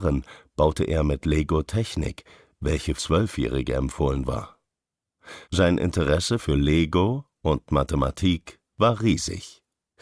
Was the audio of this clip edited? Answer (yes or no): yes